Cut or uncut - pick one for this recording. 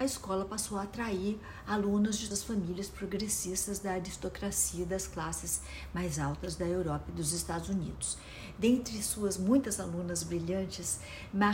cut